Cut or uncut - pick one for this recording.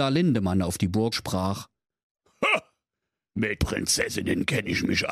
cut